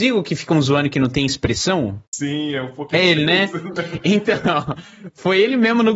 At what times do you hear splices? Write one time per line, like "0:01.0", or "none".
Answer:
0:02.1